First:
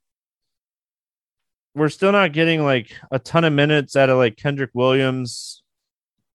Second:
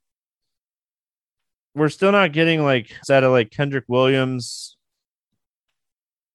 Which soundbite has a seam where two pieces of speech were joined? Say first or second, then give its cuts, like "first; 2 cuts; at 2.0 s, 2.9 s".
second; 1 cut; at 3.0 s